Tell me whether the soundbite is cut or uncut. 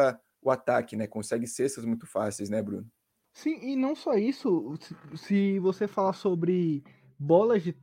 uncut